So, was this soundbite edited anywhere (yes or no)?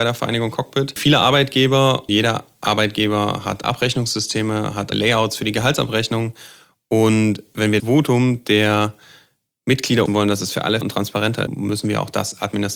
yes